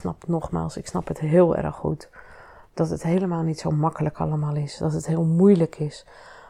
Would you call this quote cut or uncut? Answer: uncut